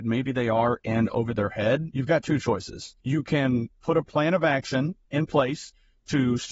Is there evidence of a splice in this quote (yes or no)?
yes